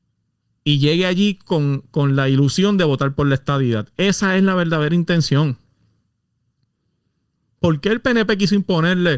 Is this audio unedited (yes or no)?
yes